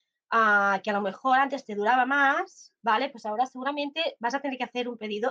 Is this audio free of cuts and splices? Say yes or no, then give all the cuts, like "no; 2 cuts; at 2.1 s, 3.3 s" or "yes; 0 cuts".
yes; 0 cuts